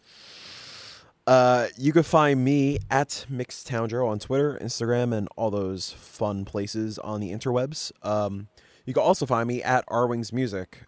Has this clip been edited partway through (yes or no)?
no